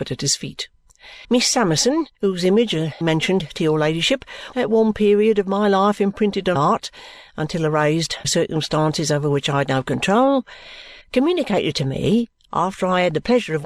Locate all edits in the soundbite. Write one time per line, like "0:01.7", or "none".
0:01.2
0:02.1
0:03.0
0:04.5
0:06.6
0:08.2
0:11.0